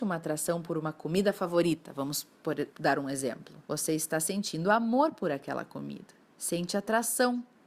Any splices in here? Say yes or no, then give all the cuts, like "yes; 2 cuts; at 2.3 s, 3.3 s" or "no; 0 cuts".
yes; 3 cuts; at 2.7 s, 3.6 s, 6.2 s